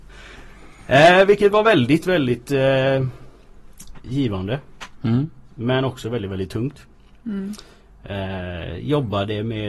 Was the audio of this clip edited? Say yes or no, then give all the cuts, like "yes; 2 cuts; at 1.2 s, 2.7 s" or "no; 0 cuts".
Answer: no; 0 cuts